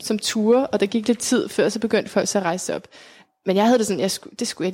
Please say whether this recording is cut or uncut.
uncut